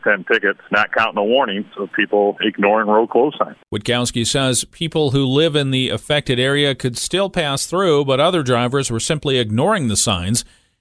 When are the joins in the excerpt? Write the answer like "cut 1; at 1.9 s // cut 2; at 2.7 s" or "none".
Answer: cut 1; at 3.6 s